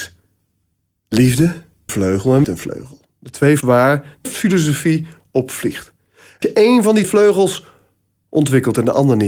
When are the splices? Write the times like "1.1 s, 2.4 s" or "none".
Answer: 1.9 s, 2.4 s, 3.6 s, 4.3 s, 6.4 s, 7.0 s